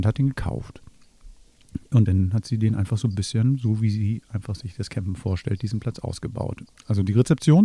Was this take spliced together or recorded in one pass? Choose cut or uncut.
uncut